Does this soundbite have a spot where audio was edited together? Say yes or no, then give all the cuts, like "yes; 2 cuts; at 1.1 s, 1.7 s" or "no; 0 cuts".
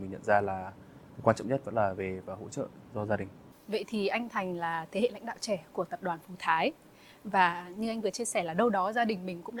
no; 0 cuts